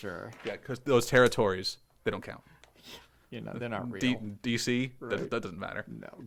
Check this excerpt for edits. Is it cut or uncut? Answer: uncut